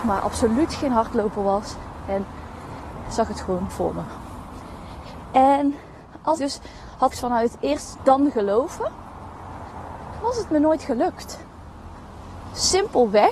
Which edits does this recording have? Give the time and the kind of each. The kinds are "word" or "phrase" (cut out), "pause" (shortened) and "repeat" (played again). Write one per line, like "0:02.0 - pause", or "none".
0:03.0 - word
0:03.7 - word
0:06.4 - word
0:07.1 - word
0:08.0 - word
0:10.2 - word